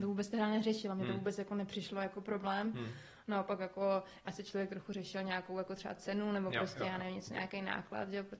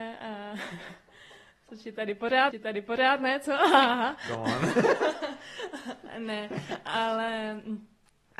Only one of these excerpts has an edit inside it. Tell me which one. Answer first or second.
second